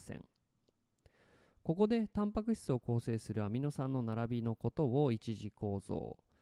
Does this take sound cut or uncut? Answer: uncut